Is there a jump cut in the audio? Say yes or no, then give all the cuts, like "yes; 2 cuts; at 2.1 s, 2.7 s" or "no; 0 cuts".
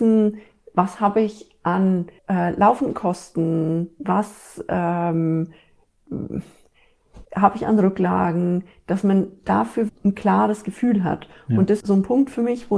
yes; 4 cuts; at 2.2 s, 7.2 s, 9.9 s, 11.8 s